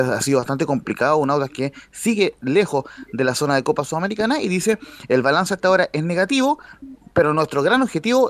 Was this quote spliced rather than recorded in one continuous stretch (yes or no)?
no